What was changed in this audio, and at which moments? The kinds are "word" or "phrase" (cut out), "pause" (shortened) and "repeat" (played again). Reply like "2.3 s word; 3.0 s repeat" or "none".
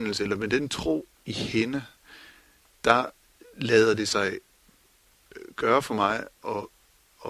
3.4 s pause